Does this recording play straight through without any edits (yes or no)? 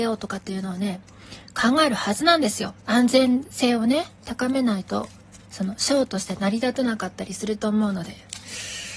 no